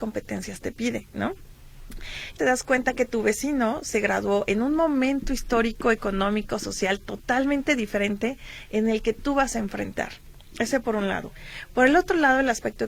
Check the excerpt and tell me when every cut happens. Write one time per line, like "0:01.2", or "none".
0:02.4